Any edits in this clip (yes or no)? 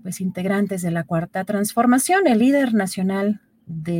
no